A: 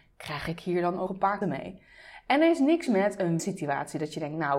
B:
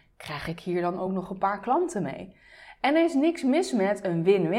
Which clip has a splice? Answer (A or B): A